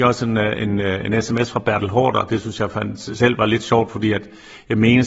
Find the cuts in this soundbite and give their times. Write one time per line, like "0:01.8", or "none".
none